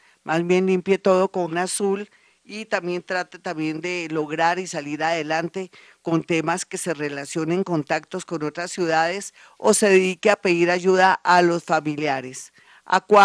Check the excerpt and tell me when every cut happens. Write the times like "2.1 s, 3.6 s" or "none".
1.5 s